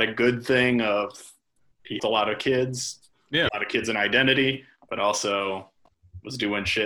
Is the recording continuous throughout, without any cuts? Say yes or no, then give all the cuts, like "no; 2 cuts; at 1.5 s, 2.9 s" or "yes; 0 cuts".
no; 2 cuts; at 2.0 s, 3.5 s